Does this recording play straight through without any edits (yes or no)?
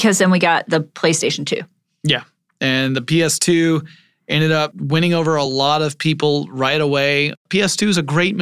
yes